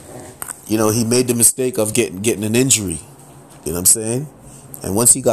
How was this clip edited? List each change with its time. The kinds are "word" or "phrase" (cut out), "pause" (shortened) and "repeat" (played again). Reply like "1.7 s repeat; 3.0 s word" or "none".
none